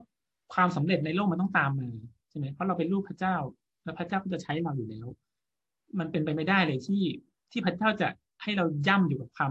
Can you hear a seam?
no; 0 cuts

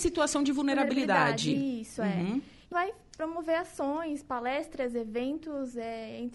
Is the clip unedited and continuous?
no; 1 cut; at 2.7 s

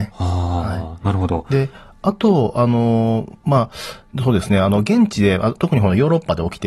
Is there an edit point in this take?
no; 0 cuts

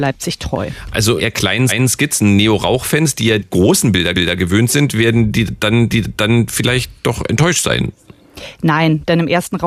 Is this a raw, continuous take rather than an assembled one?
no; 5 cuts; at 1.2 s, 1.7 s, 3.4 s, 4.1 s, 5.9 s

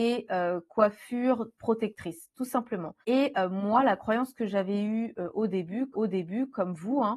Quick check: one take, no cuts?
no; 2 cuts; at 3.0 s, 5.9 s

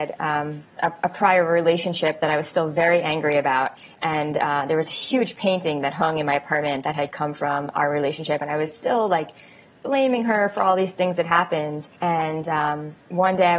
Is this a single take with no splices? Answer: no; 1 cut; at 12.0 s

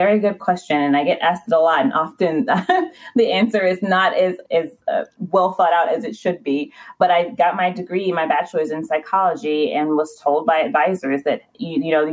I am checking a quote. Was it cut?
no; 0 cuts

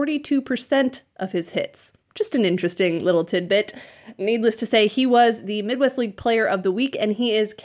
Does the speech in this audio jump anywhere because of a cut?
yes; 1 cut; at 2.0 s

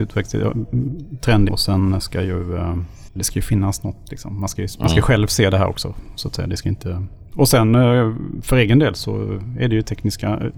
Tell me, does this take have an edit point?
yes; 1 cut; at 1.5 s

